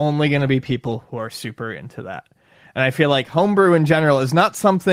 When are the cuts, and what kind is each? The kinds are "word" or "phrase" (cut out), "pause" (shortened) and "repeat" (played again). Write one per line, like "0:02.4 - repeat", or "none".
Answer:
none